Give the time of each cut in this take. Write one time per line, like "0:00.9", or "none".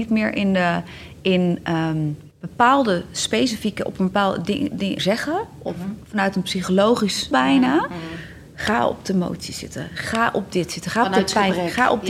0:02.3
0:05.0
0:07.3